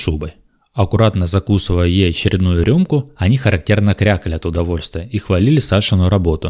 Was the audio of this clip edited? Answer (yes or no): no